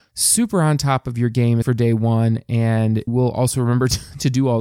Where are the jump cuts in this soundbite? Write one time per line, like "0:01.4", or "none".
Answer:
0:01.6
0:03.1